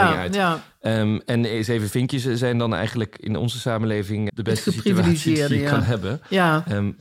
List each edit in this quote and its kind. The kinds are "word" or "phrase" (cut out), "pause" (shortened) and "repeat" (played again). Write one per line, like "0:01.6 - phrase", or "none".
0:04.3 - word